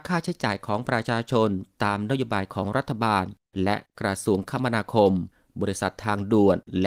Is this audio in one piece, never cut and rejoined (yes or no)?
yes